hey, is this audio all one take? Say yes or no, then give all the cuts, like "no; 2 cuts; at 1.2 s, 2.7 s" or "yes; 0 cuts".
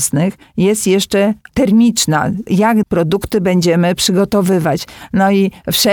no; 2 cuts; at 1.5 s, 2.8 s